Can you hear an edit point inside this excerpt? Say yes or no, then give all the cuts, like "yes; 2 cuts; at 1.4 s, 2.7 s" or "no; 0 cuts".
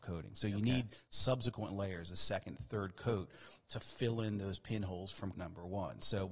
yes; 1 cut; at 5.3 s